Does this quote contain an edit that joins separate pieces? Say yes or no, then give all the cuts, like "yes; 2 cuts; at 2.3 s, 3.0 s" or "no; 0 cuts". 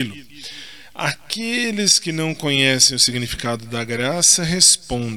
no; 0 cuts